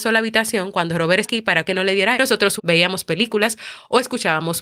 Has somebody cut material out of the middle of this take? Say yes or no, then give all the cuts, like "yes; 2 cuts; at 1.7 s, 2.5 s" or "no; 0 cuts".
yes; 4 cuts; at 1.2 s, 1.6 s, 2.1 s, 2.6 s